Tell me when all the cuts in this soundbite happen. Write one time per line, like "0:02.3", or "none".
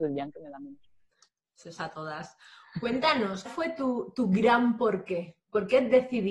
0:01.8
0:03.5